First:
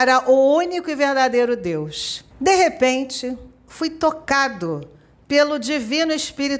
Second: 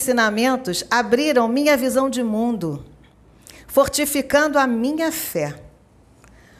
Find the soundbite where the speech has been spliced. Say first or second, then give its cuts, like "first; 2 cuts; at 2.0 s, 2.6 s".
first; 1 cut; at 2.3 s